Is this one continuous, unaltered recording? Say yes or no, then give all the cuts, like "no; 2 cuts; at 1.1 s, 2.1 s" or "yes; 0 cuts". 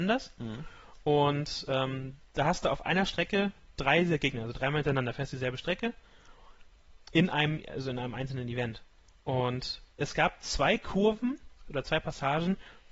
no; 2 cuts; at 9.9 s, 11.6 s